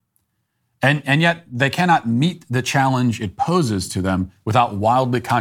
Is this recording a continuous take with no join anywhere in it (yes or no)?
yes